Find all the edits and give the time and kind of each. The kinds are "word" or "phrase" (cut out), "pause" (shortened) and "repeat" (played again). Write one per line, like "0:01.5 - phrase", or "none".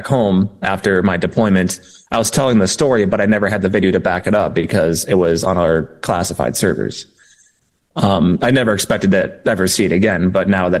none